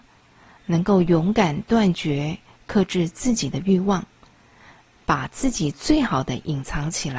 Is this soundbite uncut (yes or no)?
yes